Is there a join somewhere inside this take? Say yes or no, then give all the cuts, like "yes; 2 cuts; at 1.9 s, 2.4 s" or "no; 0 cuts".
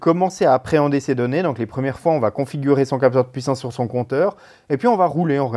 no; 0 cuts